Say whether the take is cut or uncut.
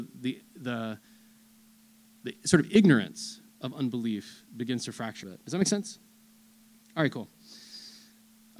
cut